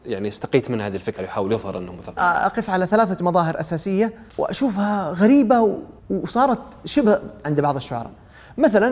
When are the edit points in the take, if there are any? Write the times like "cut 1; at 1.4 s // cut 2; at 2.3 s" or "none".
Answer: cut 1; at 1.2 s // cut 2; at 2.2 s // cut 3; at 4.3 s // cut 4; at 6.0 s // cut 5; at 7.4 s